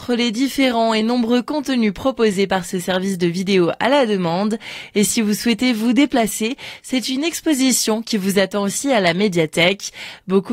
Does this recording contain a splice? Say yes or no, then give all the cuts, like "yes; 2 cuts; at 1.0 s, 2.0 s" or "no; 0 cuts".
no; 0 cuts